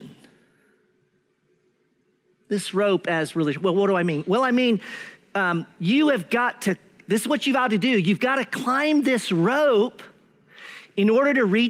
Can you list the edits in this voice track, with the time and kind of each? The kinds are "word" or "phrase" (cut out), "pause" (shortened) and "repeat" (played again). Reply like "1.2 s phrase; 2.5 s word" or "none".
none